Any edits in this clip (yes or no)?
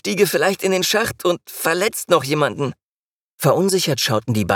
no